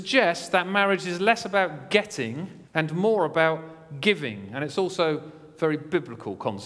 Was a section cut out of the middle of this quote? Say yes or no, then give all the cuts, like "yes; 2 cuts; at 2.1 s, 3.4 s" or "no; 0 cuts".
yes; 1 cut; at 2.7 s